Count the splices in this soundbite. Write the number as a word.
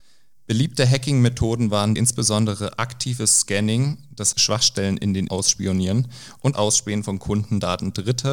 four